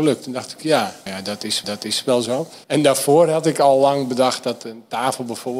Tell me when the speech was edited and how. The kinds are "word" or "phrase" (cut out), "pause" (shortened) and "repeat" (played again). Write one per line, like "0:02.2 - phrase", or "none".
0:01.1 - word
0:01.6 - repeat
0:02.6 - pause